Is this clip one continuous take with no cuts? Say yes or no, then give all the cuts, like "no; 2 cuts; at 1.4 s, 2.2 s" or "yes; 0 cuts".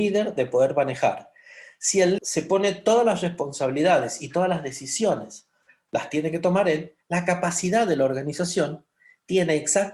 no; 2 cuts; at 2.2 s, 7.0 s